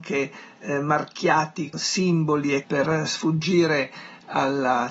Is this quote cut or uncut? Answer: cut